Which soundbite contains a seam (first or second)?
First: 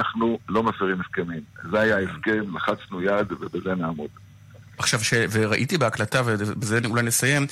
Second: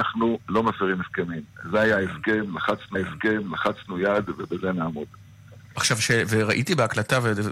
second